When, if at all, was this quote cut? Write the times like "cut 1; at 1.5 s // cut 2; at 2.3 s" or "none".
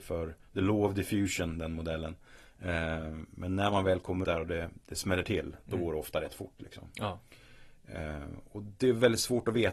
cut 1; at 4.2 s